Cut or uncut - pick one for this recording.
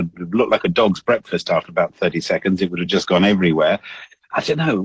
uncut